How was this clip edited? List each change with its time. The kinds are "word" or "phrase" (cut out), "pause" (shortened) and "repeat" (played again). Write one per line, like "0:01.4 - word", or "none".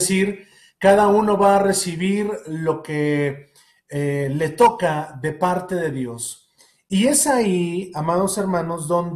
none